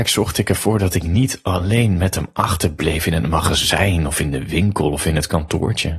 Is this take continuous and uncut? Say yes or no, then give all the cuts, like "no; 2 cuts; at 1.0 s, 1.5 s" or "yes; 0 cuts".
yes; 0 cuts